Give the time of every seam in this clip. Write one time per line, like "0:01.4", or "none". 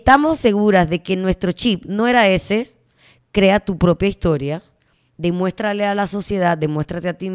none